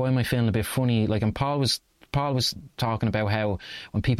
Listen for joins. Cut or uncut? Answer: uncut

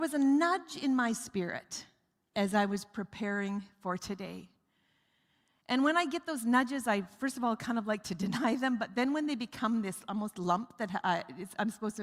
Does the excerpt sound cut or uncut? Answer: uncut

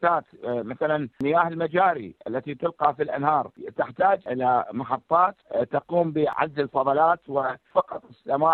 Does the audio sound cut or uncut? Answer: uncut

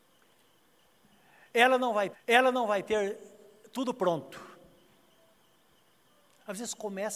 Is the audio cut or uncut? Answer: cut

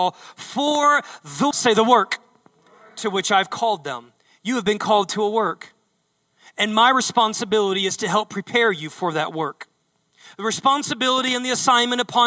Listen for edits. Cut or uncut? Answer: cut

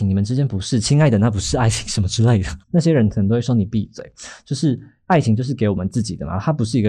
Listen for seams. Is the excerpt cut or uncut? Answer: cut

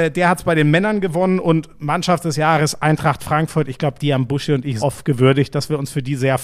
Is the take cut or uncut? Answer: cut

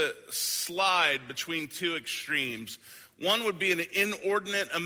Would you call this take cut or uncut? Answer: uncut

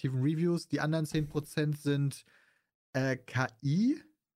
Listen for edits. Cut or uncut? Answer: uncut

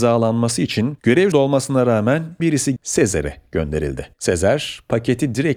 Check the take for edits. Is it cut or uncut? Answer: cut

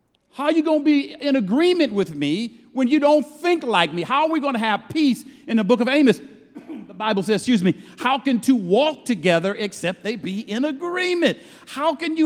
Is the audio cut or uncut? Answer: uncut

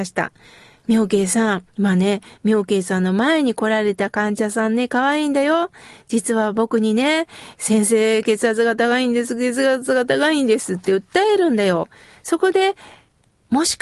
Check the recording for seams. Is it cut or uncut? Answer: cut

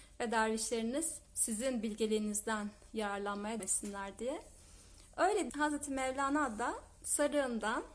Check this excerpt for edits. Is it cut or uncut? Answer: cut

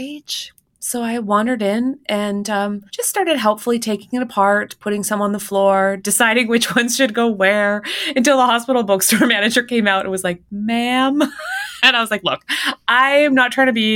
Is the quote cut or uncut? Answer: cut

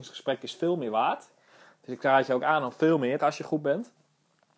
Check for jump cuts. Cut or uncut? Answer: cut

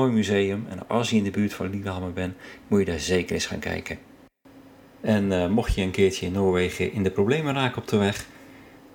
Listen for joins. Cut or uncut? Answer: uncut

